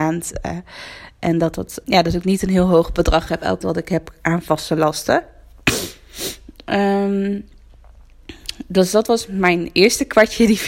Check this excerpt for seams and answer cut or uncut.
cut